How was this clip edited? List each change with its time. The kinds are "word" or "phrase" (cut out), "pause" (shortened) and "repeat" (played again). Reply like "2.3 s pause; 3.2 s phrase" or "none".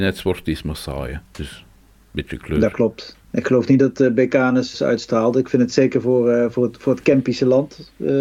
1.3 s pause; 3.2 s pause; 4.7 s phrase